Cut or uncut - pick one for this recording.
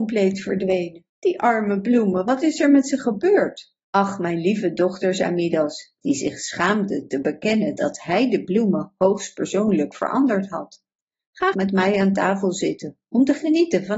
cut